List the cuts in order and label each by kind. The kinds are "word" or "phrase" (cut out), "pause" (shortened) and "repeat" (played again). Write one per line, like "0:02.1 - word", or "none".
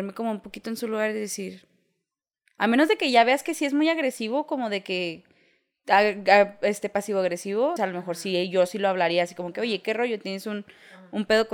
0:07.8 - word